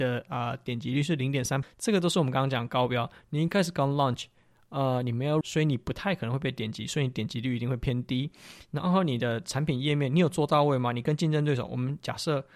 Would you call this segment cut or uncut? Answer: cut